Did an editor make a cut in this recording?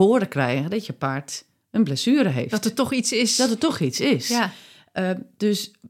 no; 0 cuts

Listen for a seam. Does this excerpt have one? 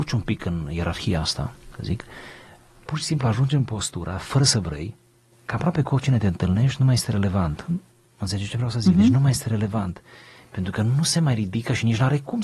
no; 0 cuts

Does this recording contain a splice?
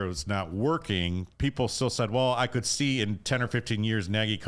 no; 0 cuts

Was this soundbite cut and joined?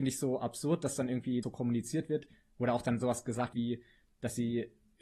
yes; 2 cuts; at 1.4 s, 3.5 s

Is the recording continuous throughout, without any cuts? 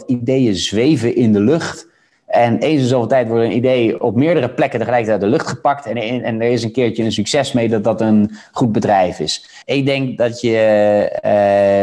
no; 1 cut; at 9.6 s

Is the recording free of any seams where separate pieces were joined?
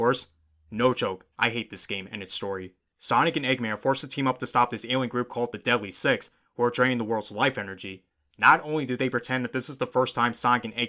yes; 0 cuts

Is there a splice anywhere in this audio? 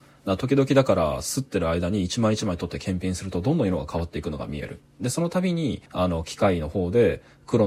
yes; 1 cut; at 5.9 s

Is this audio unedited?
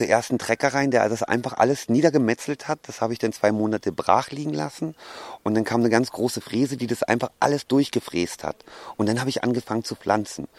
yes; 0 cuts

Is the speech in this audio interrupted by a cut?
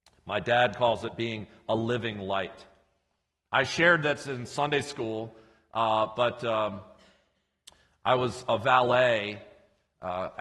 no; 0 cuts

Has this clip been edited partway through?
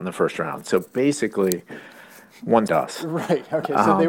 yes; 1 cut; at 2.7 s

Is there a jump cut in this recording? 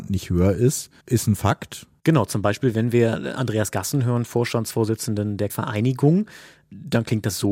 yes; 2 cuts; at 1.0 s, 5.5 s

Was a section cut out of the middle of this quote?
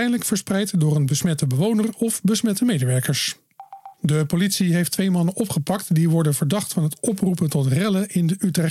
yes; 1 cut; at 3.9 s

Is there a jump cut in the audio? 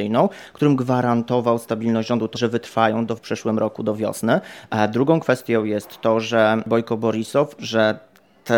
yes; 3 cuts; at 2.3 s, 3.2 s, 7.6 s

